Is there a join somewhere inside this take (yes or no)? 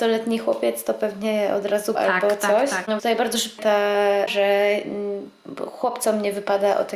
yes